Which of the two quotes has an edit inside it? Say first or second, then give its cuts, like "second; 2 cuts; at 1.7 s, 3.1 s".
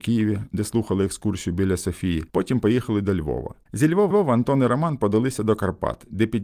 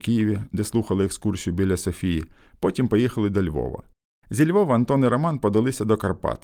first; 3 cuts; at 2.3 s, 3.6 s, 4.1 s